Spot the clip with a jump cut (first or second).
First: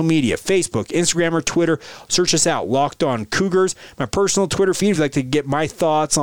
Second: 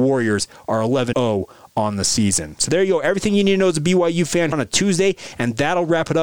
second